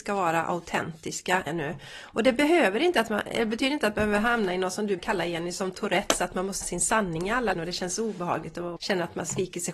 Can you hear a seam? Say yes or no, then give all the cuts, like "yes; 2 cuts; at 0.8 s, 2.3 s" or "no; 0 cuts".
yes; 5 cuts; at 1.5 s, 5.0 s, 6.6 s, 7.5 s, 8.8 s